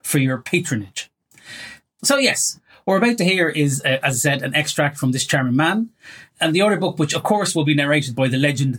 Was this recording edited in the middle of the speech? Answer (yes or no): no